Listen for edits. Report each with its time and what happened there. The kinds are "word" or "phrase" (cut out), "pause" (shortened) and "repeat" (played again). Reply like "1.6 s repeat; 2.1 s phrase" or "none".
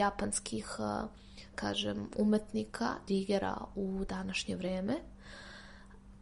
1.5 s word; 3.1 s word